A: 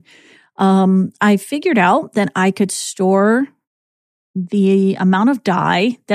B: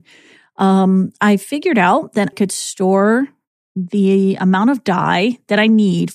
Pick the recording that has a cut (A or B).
B